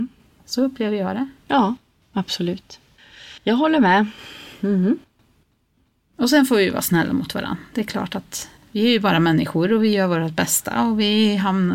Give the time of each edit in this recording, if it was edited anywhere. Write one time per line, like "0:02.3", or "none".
0:03.4

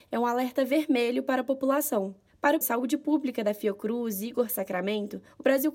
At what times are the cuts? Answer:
0:02.6

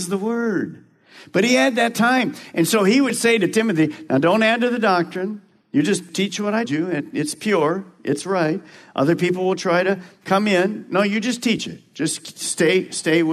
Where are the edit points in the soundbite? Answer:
0:06.7

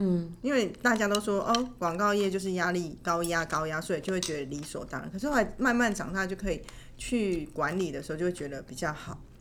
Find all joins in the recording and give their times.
none

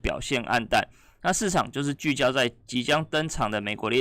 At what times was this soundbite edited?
none

